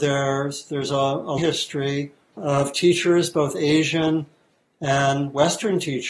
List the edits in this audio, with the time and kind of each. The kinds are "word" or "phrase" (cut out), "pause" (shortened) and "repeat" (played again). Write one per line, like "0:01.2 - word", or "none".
0:01.4 - word
0:02.4 - word